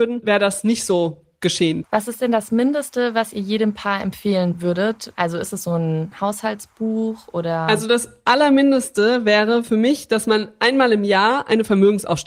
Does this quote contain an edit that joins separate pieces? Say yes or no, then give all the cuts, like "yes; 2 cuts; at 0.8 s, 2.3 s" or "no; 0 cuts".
no; 0 cuts